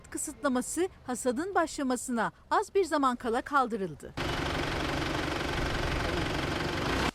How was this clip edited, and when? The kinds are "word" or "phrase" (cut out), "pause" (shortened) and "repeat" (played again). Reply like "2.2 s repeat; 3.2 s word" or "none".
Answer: none